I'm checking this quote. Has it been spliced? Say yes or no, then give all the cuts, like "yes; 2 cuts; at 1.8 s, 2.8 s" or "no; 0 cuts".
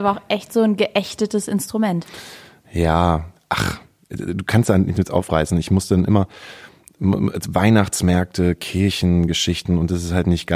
no; 0 cuts